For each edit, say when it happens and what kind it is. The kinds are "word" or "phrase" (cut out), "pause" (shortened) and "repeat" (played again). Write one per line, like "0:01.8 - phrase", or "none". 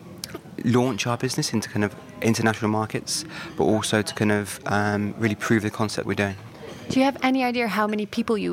0:06.1 - phrase